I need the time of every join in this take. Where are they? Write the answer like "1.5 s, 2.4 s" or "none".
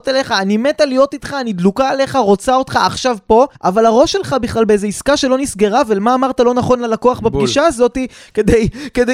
3.5 s